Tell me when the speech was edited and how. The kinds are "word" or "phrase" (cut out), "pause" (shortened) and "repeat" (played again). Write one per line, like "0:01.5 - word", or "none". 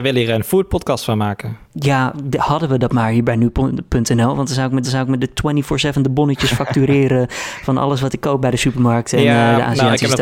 0:01.6 - pause
0:04.8 - repeat

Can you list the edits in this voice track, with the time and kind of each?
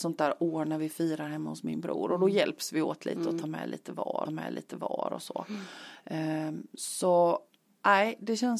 0:04.3 - repeat

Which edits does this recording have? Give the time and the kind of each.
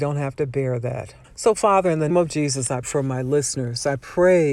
0:01.2 - pause
0:02.1 - word
0:02.8 - word

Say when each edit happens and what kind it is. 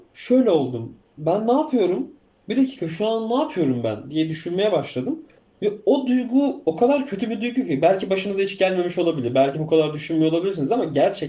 none

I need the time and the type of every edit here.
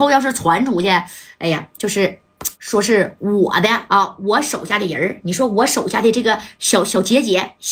0:02.6 - pause

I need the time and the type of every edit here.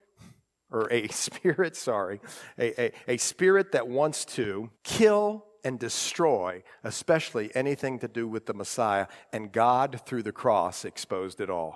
0:04.8 - pause

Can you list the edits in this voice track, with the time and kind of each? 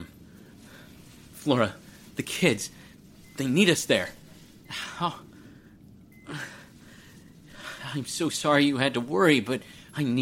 none

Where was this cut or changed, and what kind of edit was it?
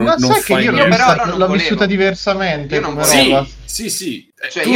0:01.2 - phrase

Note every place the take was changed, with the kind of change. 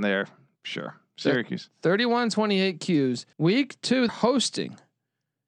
0:03.3 - pause
0:04.1 - word

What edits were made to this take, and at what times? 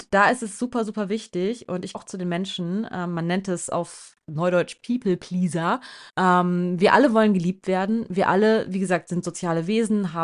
0:01.9 - word
0:06.1 - pause

